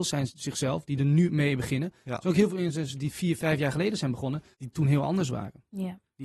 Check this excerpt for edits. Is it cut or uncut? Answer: cut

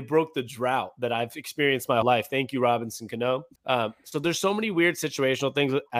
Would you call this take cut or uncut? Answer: cut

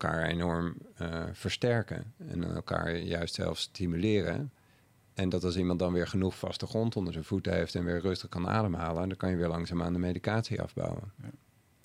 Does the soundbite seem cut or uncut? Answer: uncut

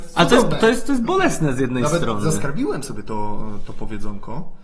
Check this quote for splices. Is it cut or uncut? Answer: uncut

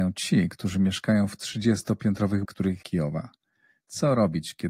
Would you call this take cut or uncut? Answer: cut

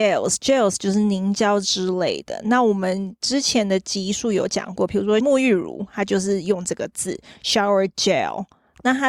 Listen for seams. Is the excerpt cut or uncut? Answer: uncut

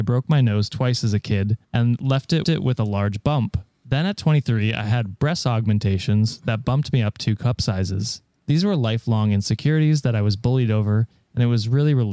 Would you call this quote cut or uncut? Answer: cut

